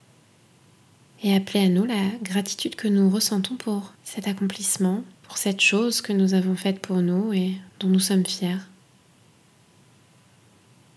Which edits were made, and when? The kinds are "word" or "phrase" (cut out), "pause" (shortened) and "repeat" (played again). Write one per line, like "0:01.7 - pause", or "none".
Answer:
0:04.0 - pause
0:05.1 - pause
0:07.7 - pause